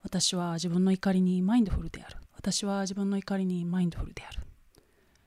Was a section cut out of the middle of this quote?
yes; 1 cut; at 2.3 s

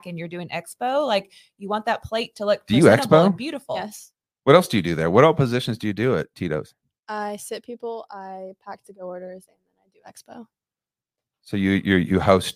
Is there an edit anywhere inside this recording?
no; 0 cuts

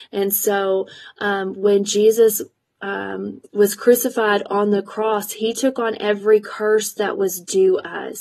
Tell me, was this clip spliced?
no; 0 cuts

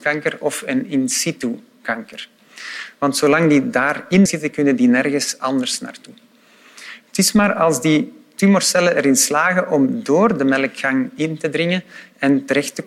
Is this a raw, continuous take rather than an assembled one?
no; 1 cut; at 4.3 s

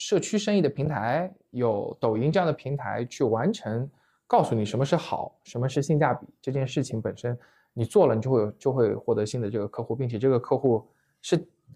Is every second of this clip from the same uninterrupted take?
yes; 0 cuts

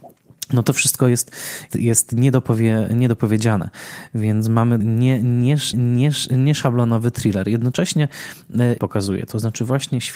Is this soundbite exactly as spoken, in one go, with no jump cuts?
no; 4 cuts; at 1.7 s, 4.8 s, 5.7 s, 8.8 s

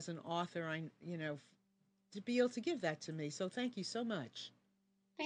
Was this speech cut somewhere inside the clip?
no; 0 cuts

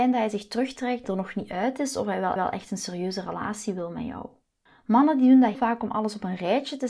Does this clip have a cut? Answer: yes; 4 cuts; at 1.0 s, 2.4 s, 4.7 s, 5.5 s

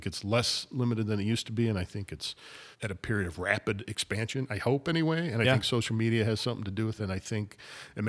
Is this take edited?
yes; 2 cuts; at 2.7 s, 7.0 s

